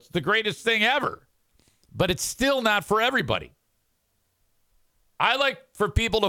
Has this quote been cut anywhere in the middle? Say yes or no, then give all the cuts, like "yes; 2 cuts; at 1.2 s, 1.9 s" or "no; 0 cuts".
no; 0 cuts